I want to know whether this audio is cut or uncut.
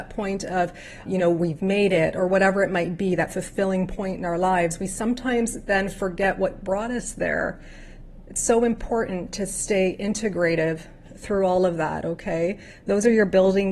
cut